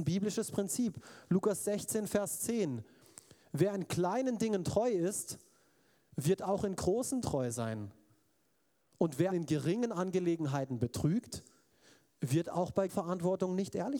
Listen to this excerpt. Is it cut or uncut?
cut